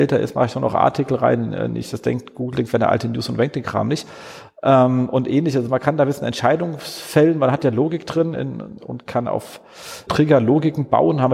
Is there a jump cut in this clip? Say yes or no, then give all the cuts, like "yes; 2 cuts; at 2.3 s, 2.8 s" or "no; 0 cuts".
yes; 3 cuts; at 8.3 s, 8.8 s, 10.1 s